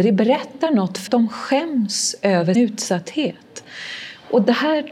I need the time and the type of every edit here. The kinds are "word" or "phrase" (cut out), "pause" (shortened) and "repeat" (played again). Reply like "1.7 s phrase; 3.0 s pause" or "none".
1.1 s word; 2.5 s word